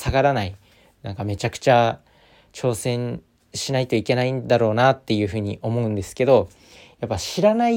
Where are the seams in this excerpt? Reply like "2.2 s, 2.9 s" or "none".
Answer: none